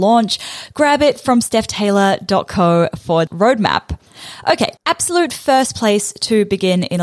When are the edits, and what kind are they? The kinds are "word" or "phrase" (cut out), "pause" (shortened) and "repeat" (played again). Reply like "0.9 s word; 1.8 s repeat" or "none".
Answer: 3.3 s word; 4.8 s word

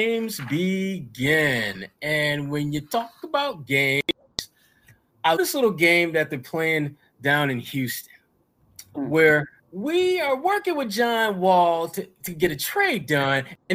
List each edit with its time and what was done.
5.4 s word; 8.9 s word; 9.6 s pause

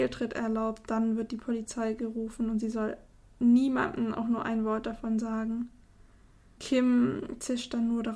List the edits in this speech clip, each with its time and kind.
none

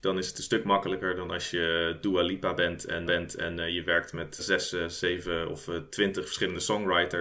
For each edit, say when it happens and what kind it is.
3.1 s repeat; 4.4 s word

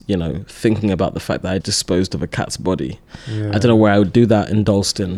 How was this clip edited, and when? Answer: 1.6 s word

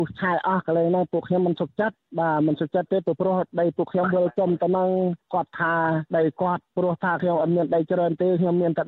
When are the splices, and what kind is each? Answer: 6.1 s pause

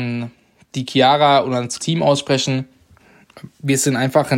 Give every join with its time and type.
1.8 s word

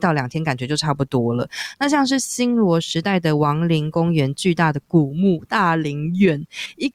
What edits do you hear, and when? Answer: none

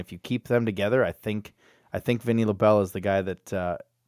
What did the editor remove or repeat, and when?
none

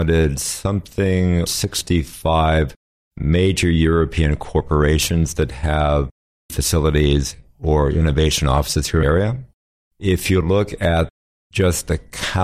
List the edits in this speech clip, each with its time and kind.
1.5 s word; 6.5 s word; 9.0 s phrase

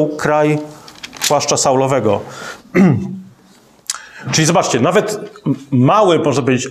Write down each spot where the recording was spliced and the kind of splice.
none

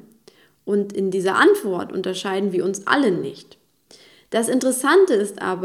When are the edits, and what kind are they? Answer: none

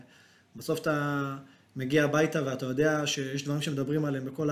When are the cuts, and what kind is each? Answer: none

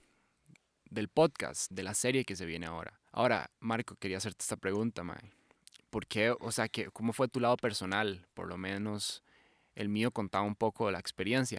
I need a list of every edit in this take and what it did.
1.7 s word; 3.1 s pause

